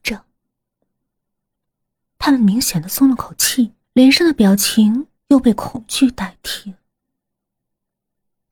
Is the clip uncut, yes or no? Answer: no